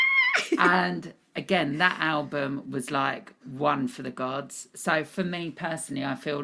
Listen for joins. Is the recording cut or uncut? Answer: cut